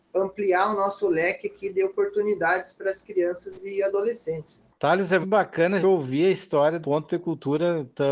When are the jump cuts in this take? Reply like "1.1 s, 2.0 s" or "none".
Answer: 4.7 s, 5.2 s, 5.8 s, 6.8 s